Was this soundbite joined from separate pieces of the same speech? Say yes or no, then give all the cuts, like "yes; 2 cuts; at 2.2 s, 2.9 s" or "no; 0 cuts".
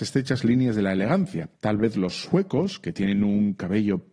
yes; 1 cut; at 1.6 s